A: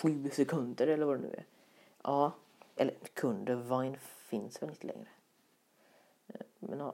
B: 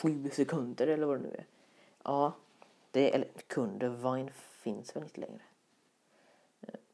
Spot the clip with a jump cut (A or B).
A